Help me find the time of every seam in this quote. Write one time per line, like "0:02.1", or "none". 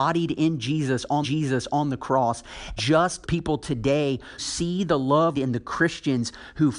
0:01.2
0:02.8
0:03.2
0:04.4
0:05.3